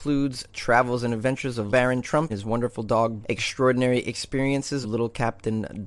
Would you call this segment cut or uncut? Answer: cut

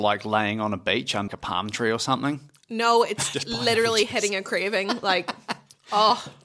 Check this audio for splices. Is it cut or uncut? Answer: cut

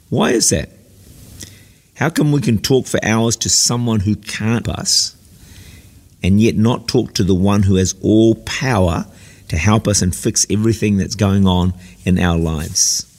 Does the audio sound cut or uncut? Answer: cut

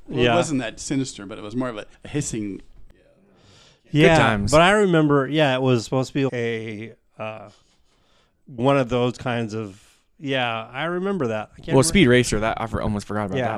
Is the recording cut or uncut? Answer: cut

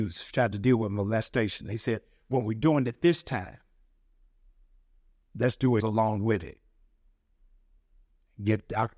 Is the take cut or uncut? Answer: cut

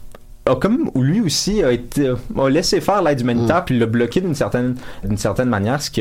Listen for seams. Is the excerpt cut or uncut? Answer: cut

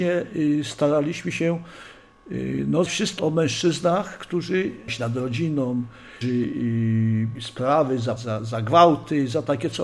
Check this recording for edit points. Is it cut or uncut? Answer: cut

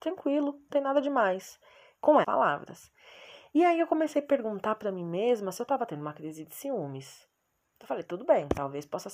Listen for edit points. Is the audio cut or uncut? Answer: cut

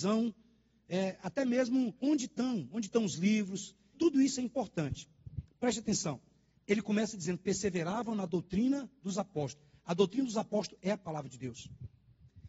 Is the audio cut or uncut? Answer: cut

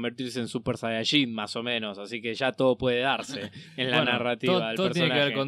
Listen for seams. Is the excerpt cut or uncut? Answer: uncut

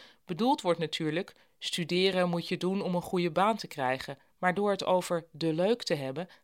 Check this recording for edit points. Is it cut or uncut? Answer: cut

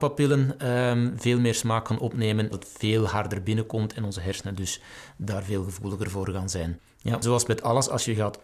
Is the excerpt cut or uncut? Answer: cut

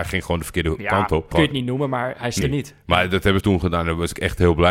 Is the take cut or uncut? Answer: cut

